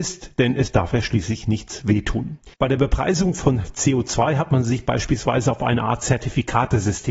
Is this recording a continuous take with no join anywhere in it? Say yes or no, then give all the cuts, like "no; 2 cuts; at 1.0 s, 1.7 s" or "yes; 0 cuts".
no; 1 cut; at 2.5 s